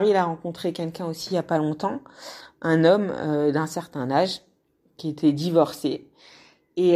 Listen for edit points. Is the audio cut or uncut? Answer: uncut